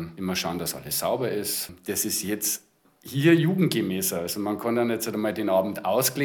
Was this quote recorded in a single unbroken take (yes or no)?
yes